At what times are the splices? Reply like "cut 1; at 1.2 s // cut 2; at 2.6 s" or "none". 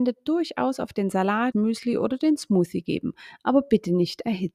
cut 1; at 1.5 s